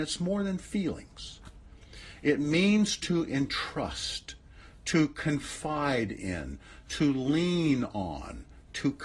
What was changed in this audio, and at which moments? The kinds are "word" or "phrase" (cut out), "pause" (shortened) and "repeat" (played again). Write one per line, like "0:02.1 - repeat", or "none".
none